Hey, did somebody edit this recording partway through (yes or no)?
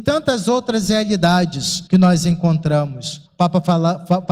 yes